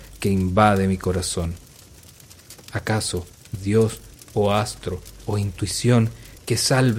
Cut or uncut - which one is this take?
cut